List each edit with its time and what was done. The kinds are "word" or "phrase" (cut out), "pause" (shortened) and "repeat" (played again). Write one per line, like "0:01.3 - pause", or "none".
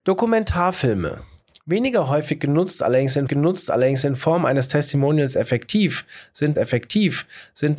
0:03.3 - repeat
0:06.6 - repeat